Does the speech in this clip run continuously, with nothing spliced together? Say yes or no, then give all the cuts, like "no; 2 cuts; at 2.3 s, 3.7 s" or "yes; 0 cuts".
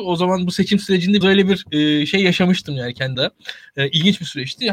no; 2 cuts; at 1.2 s, 3.1 s